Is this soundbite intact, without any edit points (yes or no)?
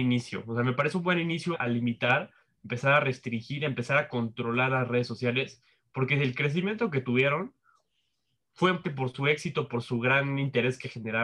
no